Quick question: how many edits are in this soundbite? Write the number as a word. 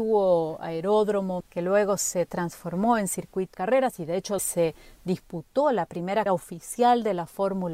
four